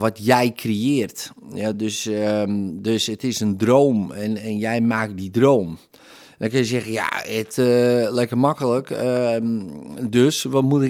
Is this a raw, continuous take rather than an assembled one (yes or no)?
yes